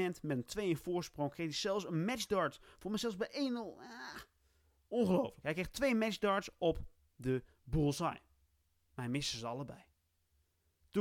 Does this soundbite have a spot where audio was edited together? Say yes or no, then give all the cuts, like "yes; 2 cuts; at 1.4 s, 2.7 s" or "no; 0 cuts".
no; 0 cuts